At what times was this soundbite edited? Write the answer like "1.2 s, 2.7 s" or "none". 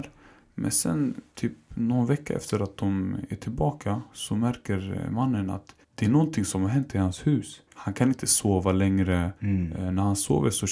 5.8 s, 7.7 s, 9.4 s